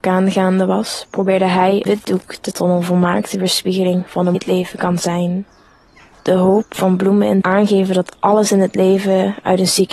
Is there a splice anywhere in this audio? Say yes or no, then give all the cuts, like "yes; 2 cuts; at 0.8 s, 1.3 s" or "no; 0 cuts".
yes; 4 cuts; at 1.9 s, 2.5 s, 4.3 s, 7.4 s